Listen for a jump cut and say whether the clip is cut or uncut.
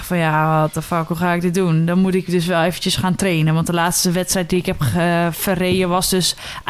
uncut